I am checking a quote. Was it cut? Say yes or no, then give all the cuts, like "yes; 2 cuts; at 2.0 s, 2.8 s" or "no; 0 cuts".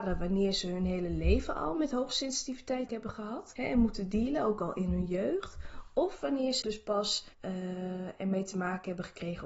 yes; 3 cuts; at 2.9 s, 6.6 s, 7.3 s